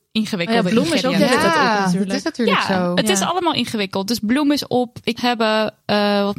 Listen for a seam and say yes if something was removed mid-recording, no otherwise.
yes